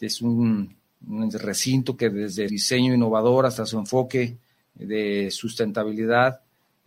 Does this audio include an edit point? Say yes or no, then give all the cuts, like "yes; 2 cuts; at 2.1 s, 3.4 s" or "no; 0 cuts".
yes; 1 cut; at 2.5 s